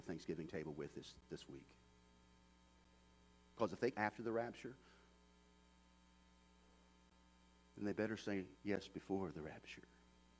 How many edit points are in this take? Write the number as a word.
three